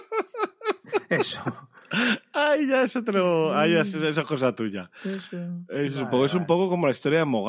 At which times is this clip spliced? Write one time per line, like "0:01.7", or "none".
none